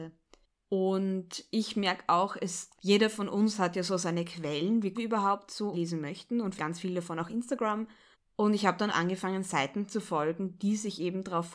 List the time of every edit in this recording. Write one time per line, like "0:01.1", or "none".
0:02.8
0:04.9
0:05.7
0:06.6
0:08.1
0:08.9